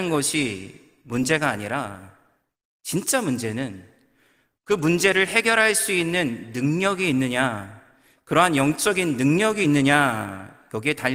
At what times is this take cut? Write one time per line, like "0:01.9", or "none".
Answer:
none